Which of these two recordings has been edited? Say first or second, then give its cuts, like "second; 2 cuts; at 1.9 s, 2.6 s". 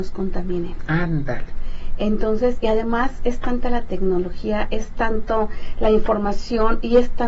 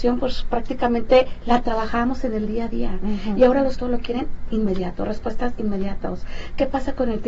second; 1 cut; at 3.7 s